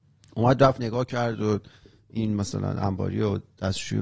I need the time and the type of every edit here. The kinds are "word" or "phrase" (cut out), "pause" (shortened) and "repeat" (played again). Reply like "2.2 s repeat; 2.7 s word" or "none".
none